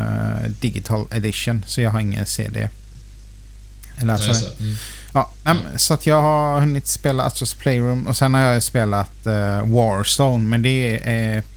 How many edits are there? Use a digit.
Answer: 0